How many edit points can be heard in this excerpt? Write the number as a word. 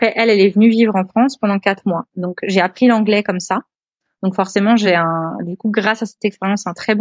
zero